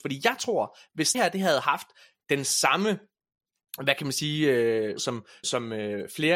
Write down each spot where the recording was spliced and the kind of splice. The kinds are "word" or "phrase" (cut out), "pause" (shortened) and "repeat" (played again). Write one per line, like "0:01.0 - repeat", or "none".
0:01.1 - word
0:05.0 - word
0:05.4 - word